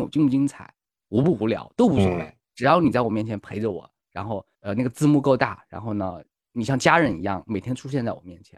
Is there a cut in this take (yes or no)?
yes